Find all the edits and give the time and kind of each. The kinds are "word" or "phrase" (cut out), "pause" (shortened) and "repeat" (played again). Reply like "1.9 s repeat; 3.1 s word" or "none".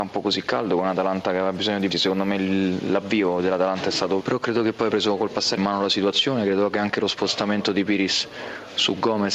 1.9 s word; 4.2 s word; 4.9 s word; 5.6 s phrase